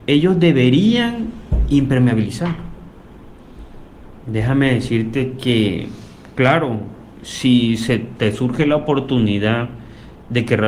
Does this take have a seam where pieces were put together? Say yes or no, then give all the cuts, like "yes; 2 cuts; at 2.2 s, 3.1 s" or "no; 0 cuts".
no; 0 cuts